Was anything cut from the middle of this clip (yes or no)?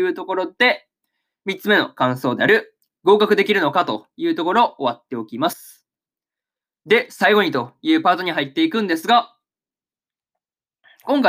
no